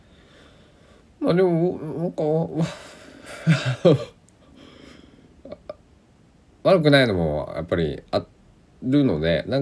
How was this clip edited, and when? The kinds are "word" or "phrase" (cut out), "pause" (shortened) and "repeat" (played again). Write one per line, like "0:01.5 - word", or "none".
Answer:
none